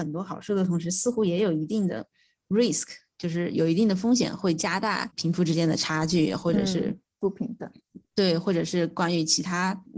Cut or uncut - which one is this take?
uncut